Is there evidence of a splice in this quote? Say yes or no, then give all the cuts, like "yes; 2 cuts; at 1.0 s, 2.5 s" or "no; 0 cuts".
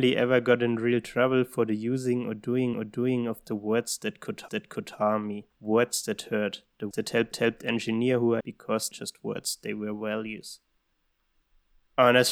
yes; 8 cuts; at 2.7 s, 4.5 s, 5.5 s, 6.9 s, 7.3 s, 8.4 s, 8.9 s, 10.9 s